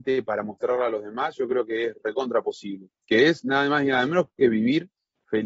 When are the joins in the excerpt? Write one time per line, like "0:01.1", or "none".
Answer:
none